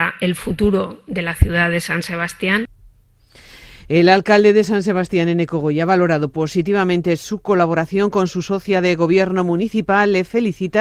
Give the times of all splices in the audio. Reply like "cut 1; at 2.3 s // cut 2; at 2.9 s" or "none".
none